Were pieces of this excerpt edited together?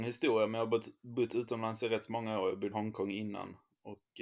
yes; 1 cut; at 2.7 s

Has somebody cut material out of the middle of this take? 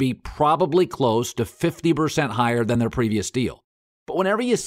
no; 0 cuts

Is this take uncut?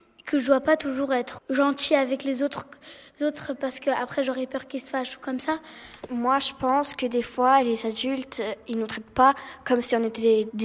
no; 1 cut; at 1.4 s

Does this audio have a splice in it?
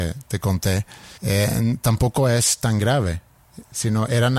yes; 1 cut; at 1.2 s

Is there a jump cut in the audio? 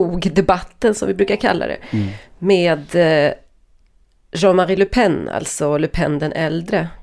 no; 0 cuts

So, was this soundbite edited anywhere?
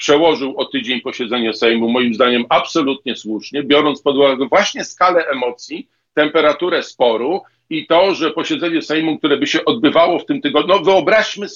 no; 0 cuts

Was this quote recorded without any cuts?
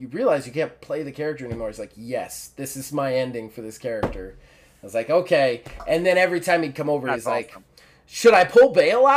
yes; 0 cuts

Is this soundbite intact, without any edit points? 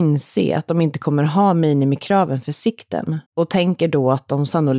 no; 1 cut; at 3.3 s

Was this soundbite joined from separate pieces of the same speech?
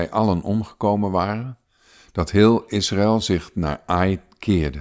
no; 0 cuts

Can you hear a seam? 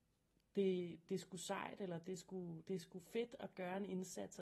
yes; 1 cut; at 1.1 s

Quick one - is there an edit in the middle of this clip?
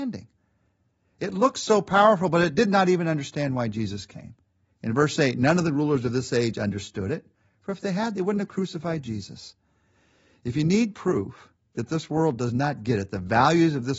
no; 0 cuts

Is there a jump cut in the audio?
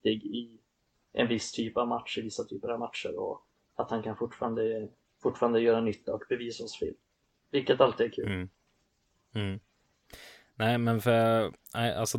no; 0 cuts

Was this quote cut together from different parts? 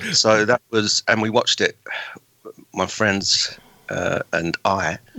no; 0 cuts

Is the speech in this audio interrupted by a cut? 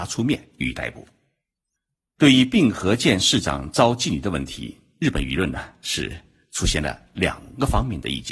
no; 0 cuts

